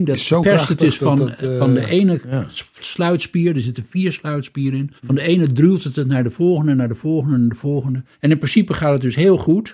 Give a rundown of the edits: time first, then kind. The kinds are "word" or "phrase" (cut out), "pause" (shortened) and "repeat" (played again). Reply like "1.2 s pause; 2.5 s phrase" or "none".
5.0 s pause; 8.1 s pause